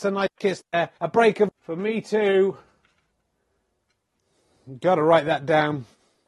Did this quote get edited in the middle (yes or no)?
yes